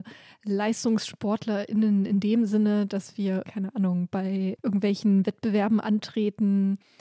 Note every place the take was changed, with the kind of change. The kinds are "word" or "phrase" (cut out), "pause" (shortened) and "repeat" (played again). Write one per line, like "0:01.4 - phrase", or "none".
0:03.4 - word